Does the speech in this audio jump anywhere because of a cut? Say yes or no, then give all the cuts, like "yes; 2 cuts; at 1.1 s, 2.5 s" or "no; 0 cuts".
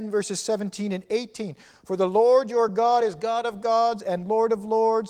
no; 0 cuts